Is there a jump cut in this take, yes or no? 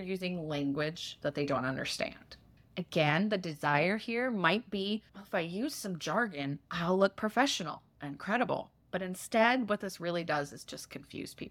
yes